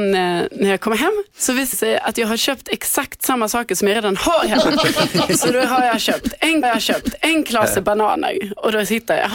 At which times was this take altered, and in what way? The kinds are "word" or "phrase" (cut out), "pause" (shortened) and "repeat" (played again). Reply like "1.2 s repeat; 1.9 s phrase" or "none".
1.3 s pause; 1.7 s word; 6.6 s repeat